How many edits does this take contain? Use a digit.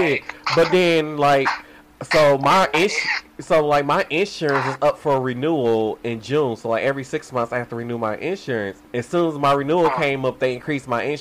1